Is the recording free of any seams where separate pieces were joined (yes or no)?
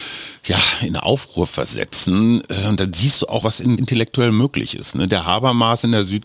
no